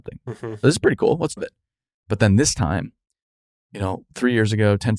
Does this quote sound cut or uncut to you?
cut